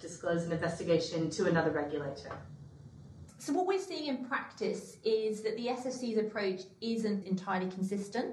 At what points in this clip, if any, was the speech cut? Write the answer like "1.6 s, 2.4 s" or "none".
7.2 s